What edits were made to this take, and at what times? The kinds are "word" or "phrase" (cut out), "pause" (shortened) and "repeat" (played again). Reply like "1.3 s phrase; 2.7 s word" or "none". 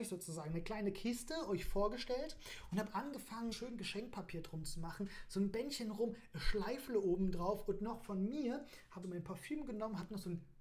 3.5 s word; 9.0 s word